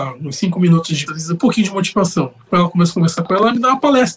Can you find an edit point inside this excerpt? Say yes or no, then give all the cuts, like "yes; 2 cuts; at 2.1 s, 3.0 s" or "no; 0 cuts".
yes; 3 cuts; at 1.1 s, 1.4 s, 2.5 s